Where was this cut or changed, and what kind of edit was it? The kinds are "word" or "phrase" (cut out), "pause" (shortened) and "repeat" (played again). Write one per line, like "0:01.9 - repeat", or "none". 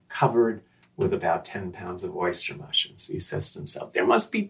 none